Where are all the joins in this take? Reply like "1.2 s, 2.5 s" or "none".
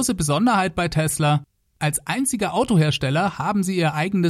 none